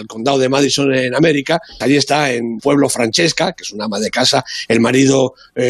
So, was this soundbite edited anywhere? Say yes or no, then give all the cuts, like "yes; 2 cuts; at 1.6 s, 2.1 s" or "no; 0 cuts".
yes; 2 cuts; at 1.8 s, 2.6 s